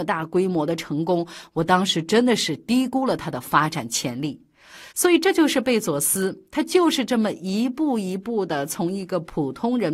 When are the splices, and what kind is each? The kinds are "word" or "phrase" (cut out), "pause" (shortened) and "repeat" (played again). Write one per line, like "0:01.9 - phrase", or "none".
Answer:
0:04.9 - pause